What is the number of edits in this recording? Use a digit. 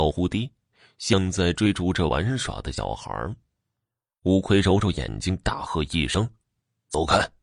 0